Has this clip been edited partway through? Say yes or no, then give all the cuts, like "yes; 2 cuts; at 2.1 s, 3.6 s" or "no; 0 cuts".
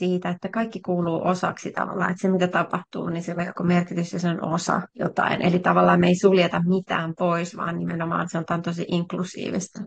yes; 1 cut; at 4.9 s